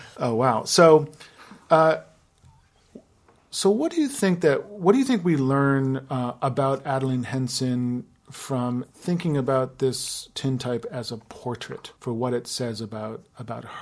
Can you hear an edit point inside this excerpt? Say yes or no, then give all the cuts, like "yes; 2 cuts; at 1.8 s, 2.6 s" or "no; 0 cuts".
yes; 3 cuts; at 1.6 s, 8.9 s, 12.0 s